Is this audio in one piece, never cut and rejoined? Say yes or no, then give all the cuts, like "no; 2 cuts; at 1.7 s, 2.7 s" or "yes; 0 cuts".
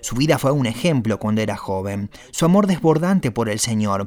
yes; 0 cuts